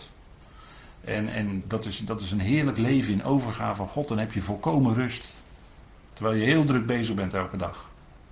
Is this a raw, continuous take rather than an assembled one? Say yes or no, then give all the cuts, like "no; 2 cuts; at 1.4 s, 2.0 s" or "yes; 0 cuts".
no; 1 cut; at 1.6 s